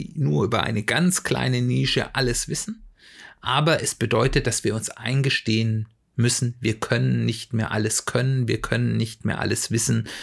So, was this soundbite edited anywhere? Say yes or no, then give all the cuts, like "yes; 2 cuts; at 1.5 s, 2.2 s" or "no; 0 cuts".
no; 0 cuts